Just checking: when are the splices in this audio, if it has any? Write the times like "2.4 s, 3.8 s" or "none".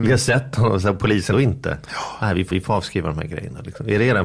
1.3 s, 2.5 s